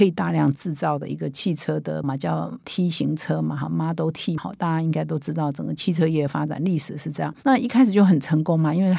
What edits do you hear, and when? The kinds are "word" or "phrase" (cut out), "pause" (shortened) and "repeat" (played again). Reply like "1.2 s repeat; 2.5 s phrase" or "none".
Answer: 2.0 s word; 4.4 s word